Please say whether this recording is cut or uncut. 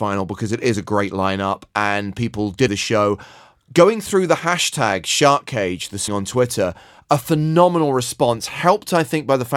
cut